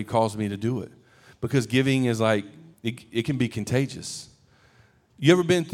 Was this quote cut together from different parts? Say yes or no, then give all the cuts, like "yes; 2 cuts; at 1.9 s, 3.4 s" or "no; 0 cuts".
no; 0 cuts